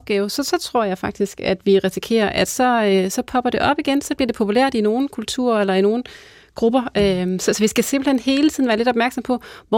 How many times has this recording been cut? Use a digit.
0